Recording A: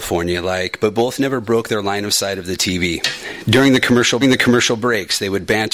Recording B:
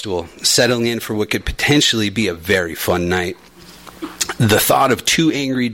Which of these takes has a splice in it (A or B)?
A